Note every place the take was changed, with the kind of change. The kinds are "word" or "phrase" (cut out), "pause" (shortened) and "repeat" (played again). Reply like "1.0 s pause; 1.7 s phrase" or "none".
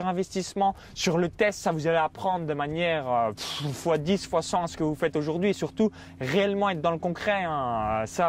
none